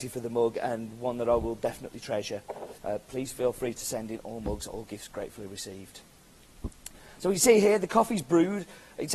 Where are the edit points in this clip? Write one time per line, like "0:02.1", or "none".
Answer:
0:02.8